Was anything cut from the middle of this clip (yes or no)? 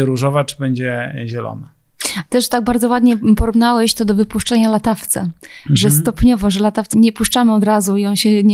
yes